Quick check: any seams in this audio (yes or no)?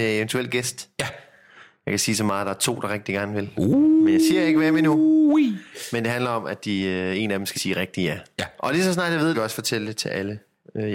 yes